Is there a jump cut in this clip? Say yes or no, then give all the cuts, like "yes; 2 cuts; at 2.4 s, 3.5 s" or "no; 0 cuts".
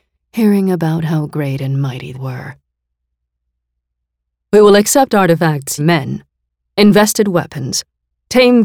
yes; 2 cuts; at 2.1 s, 5.8 s